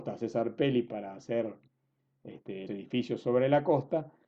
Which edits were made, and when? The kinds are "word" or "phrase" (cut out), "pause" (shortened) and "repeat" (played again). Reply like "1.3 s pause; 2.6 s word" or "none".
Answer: 2.7 s word